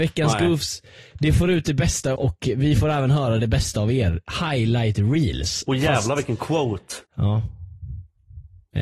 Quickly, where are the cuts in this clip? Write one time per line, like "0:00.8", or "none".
0:02.2
0:07.1